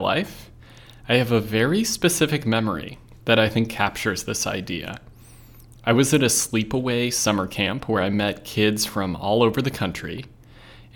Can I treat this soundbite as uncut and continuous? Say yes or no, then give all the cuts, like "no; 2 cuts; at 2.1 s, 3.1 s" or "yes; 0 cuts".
yes; 0 cuts